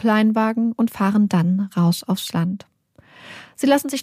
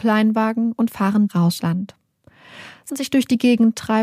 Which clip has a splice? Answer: second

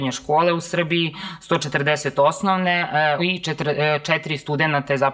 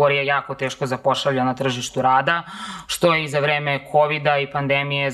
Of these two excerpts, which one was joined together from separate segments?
first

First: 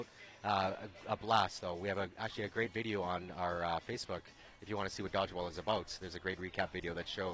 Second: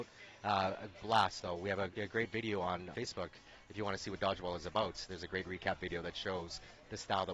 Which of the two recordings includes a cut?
second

